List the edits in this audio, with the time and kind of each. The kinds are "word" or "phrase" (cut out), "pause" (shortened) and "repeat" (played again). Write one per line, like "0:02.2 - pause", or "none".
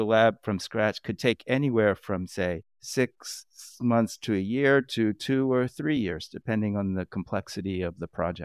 none